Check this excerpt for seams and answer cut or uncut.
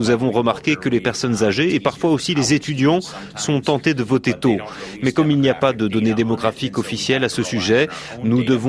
uncut